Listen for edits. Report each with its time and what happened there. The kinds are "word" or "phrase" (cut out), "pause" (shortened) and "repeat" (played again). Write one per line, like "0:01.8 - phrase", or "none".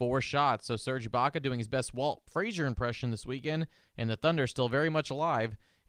none